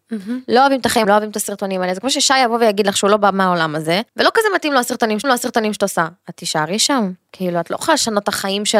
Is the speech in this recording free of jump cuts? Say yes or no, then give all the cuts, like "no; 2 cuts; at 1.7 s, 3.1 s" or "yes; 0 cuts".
no; 3 cuts; at 1.0 s, 4.1 s, 5.2 s